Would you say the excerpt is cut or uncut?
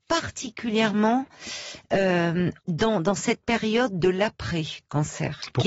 cut